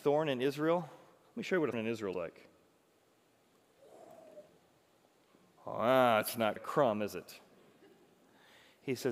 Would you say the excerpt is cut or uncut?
cut